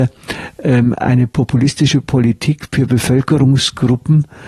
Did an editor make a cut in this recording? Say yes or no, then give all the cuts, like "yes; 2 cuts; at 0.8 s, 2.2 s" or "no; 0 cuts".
no; 0 cuts